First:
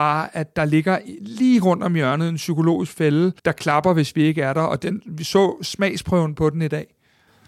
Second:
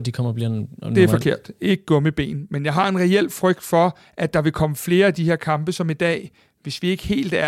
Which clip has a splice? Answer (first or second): first